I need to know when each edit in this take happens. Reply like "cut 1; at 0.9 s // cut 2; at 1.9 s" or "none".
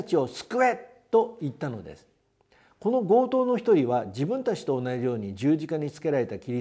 none